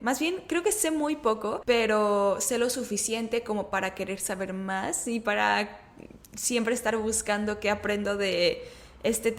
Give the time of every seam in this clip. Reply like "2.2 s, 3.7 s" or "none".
none